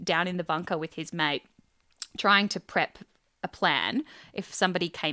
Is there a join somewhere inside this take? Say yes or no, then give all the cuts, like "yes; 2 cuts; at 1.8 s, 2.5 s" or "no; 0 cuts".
no; 0 cuts